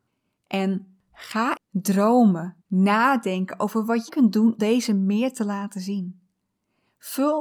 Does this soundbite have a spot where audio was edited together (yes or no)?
yes